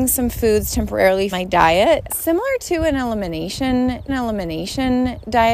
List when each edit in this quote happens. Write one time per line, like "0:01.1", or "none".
0:01.3
0:02.1
0:04.1

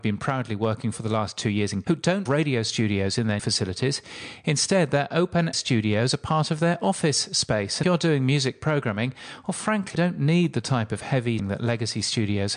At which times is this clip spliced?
0:00.9
0:01.8
0:02.3
0:03.4
0:05.5
0:07.8
0:10.0
0:11.4

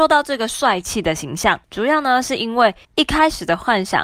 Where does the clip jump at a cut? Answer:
0:01.6
0:02.8

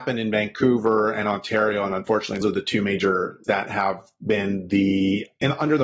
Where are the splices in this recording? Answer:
0:02.4
0:03.4

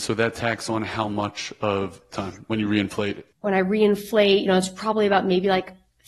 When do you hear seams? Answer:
0:02.1
0:03.3

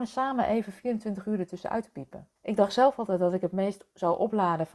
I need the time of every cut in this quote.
0:02.4

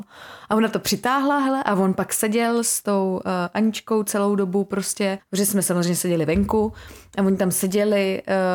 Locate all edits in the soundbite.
0:05.2

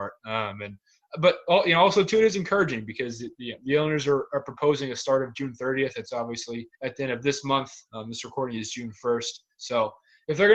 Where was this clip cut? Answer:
0:06.7

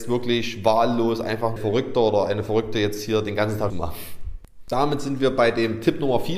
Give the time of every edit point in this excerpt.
0:01.6
0:03.7

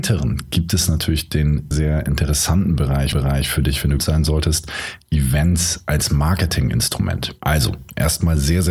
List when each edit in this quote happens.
0:01.7
0:03.1
0:04.0
0:07.4

